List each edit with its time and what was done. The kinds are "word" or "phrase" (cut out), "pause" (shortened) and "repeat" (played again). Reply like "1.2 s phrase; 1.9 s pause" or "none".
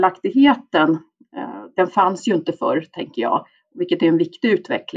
none